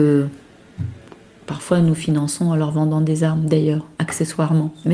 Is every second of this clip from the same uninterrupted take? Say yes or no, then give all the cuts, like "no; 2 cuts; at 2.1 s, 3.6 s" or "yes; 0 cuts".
yes; 0 cuts